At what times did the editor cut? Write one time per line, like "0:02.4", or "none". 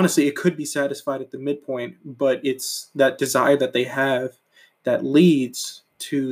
none

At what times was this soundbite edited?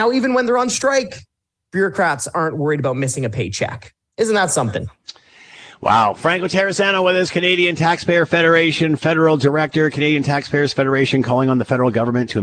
none

